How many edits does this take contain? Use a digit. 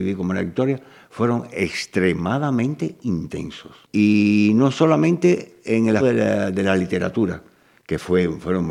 2